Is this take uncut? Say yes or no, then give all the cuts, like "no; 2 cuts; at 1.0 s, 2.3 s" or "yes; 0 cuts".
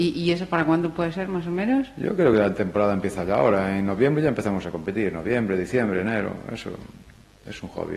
yes; 0 cuts